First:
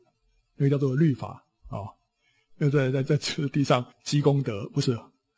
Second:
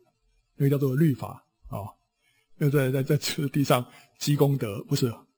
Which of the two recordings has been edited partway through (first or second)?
first